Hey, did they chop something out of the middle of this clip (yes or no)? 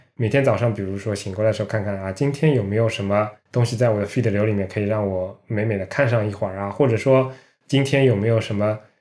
no